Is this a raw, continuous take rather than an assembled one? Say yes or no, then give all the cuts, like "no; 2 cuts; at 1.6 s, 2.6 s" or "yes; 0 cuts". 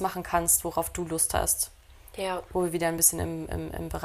yes; 0 cuts